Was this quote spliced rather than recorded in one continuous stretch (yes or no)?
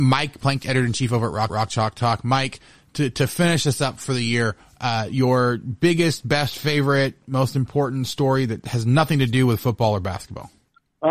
yes